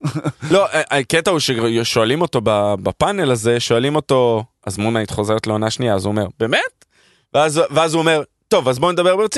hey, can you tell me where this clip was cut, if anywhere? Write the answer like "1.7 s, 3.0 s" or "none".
none